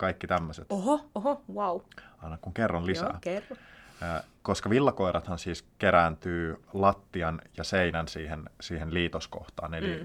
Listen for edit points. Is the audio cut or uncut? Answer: uncut